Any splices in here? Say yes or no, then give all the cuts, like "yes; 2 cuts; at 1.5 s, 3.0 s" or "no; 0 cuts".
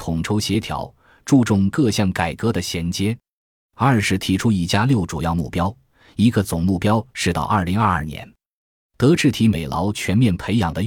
no; 0 cuts